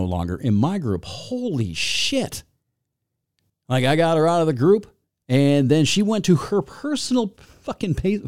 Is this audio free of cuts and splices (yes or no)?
yes